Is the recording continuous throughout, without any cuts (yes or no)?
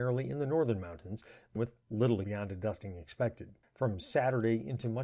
no